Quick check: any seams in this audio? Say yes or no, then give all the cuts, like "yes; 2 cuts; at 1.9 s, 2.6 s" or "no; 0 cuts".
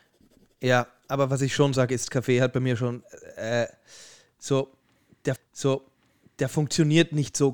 yes; 1 cut; at 5.4 s